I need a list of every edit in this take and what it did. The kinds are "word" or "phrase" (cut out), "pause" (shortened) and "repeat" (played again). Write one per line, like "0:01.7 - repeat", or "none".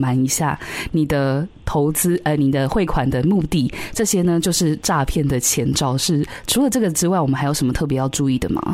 none